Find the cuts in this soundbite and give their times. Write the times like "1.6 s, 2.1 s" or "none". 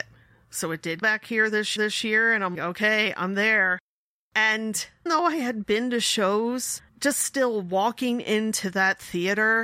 1.0 s, 1.8 s, 2.5 s, 5.1 s, 6.9 s